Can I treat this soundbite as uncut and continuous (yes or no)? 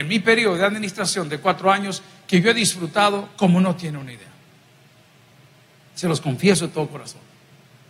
yes